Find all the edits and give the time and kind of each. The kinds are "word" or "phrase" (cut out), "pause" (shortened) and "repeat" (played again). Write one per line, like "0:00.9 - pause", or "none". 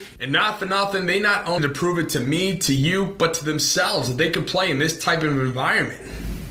0:01.6 - word